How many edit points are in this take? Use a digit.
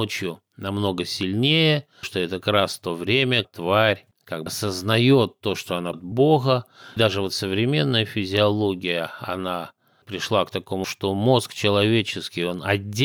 8